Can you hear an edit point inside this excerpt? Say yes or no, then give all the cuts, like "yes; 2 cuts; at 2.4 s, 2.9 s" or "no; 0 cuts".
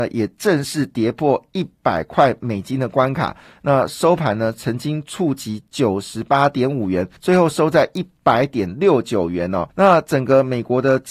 yes; 2 cuts; at 7.2 s, 9.7 s